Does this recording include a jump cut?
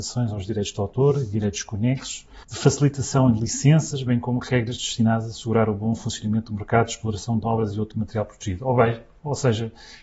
yes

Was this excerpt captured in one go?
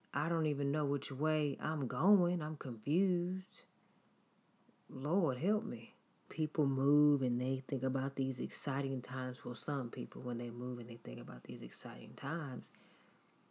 no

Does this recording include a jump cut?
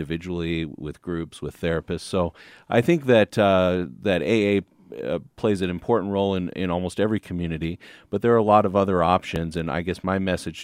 no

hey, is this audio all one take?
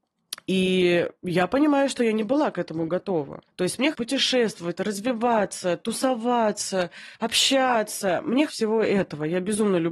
no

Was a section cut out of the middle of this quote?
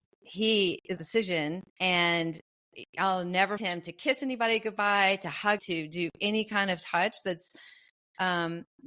yes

